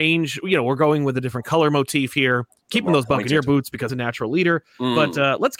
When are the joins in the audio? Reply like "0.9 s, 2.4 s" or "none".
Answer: 3.9 s